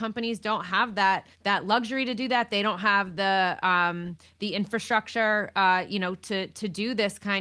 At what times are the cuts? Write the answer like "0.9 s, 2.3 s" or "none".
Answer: 1.3 s